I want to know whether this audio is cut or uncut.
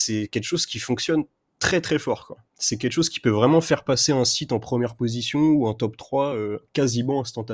uncut